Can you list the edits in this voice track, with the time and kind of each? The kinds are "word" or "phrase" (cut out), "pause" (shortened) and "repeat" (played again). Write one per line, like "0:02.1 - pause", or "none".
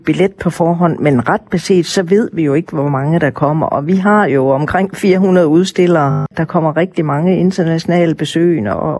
none